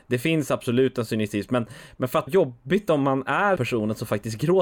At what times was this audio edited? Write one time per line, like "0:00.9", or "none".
0:02.3
0:03.6

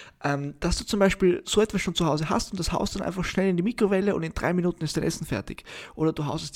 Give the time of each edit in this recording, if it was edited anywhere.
none

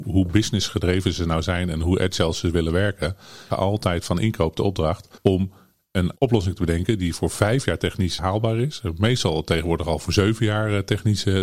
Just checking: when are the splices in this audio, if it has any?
0:03.5
0:05.2
0:06.2
0:08.2

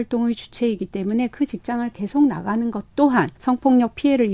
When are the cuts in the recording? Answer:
0:03.3

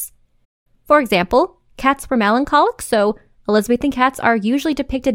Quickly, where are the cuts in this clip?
none

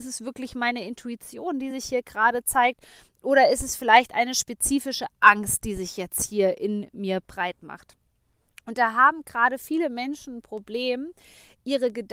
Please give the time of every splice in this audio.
none

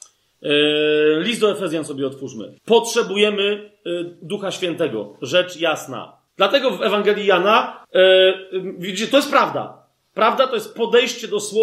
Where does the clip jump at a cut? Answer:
0:02.6
0:06.3
0:07.8

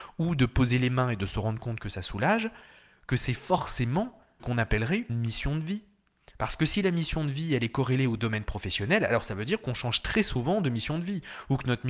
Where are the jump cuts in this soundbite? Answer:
0:04.4
0:05.1

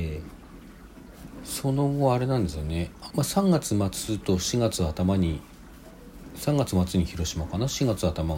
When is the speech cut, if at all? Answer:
0:03.1

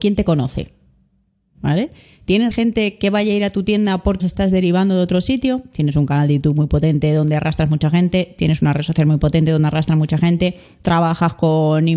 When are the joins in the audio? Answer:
0:02.5
0:04.2

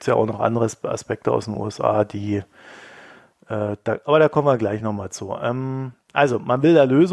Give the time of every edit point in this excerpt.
none

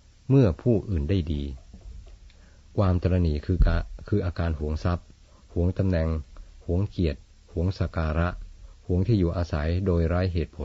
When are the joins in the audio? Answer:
none

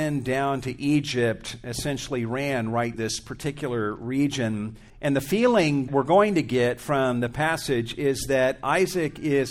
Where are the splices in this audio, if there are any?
0:02.9
0:04.9
0:05.9

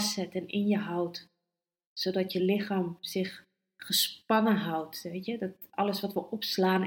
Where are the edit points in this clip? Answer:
none

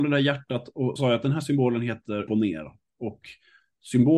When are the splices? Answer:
0:01.0
0:02.3

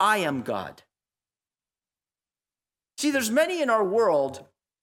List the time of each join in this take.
none

